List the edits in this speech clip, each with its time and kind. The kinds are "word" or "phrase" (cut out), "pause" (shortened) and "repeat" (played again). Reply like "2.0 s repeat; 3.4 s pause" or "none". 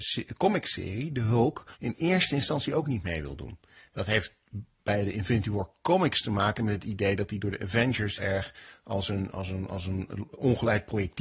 1.7 s pause; 8.2 s word